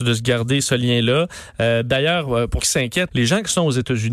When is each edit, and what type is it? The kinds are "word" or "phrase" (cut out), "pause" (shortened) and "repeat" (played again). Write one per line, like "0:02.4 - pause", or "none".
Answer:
0:02.6 - word
0:03.1 - word